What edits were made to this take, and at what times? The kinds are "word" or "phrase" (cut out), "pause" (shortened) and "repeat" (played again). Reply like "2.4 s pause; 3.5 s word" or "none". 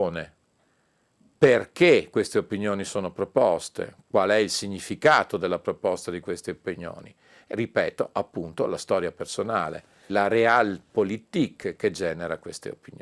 7.5 s word; 10.1 s word